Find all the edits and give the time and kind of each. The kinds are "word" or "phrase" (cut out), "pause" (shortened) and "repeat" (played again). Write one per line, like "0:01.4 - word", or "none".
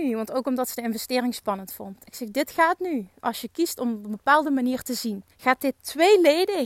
0:05.3 - pause